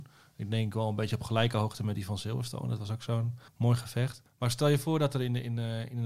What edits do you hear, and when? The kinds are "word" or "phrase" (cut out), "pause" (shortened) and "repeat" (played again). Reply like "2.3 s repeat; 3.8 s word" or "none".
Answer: 3.5 s pause; 4.3 s pause